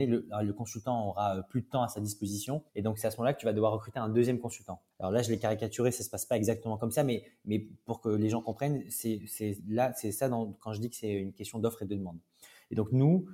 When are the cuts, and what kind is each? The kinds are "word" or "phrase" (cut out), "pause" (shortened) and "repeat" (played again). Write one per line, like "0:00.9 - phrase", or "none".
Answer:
0:02.7 - pause
0:04.9 - pause